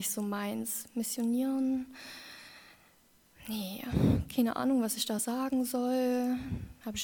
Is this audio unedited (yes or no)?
yes